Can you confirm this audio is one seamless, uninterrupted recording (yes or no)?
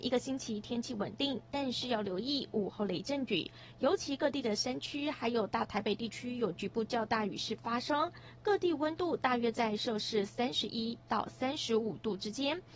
yes